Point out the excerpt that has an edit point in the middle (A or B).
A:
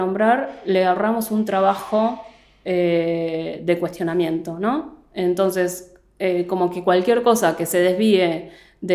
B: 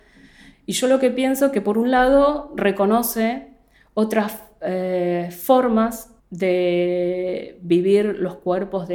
B